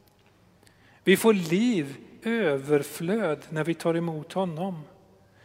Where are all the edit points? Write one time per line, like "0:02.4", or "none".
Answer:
0:02.2